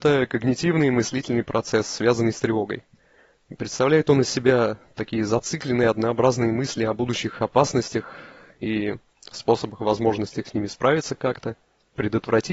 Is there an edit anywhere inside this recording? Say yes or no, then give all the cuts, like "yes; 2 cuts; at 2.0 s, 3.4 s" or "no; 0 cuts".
no; 0 cuts